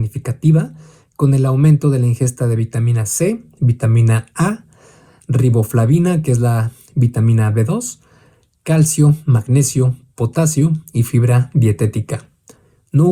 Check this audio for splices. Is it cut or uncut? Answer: uncut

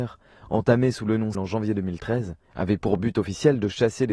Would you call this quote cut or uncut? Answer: cut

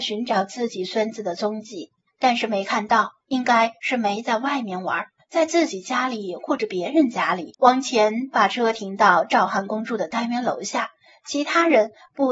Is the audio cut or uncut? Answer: cut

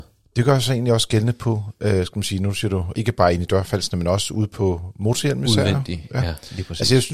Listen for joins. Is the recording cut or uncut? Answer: cut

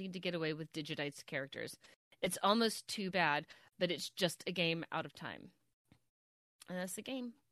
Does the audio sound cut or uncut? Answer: uncut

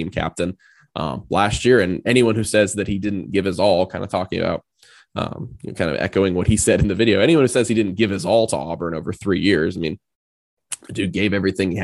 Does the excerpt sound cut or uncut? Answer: uncut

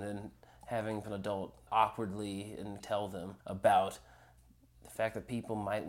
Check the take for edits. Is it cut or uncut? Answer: cut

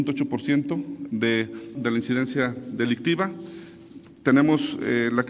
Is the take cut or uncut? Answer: cut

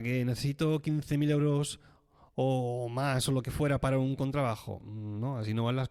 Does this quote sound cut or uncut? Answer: uncut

